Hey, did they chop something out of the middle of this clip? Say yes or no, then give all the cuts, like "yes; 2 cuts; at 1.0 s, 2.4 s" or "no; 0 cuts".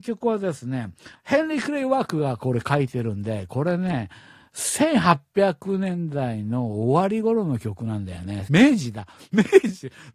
no; 0 cuts